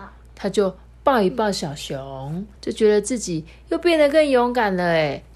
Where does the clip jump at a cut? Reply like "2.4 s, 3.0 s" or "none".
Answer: 2.6 s